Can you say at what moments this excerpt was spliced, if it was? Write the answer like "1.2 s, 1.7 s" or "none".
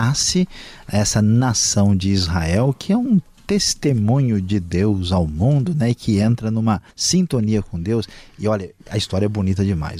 6.9 s